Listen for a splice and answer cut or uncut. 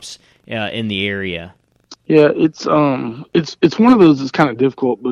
cut